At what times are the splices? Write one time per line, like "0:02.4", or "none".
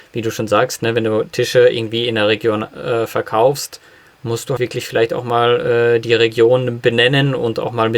0:04.6